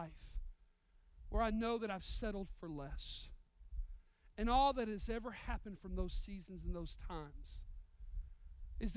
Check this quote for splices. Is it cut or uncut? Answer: uncut